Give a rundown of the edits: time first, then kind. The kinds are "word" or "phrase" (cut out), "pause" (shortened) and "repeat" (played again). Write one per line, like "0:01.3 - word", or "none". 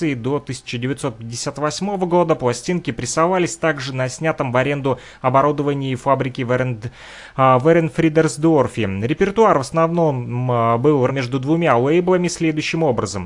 0:11.1 - word